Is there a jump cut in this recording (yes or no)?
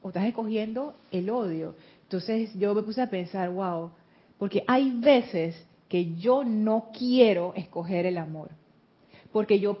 no